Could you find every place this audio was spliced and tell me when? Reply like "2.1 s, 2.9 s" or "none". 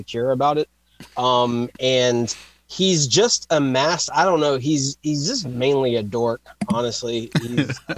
none